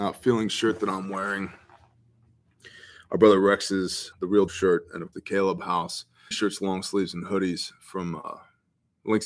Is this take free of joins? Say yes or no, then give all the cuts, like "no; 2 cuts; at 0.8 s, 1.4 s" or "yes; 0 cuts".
no; 4 cuts; at 4.1 s, 4.5 s, 5.1 s, 6.3 s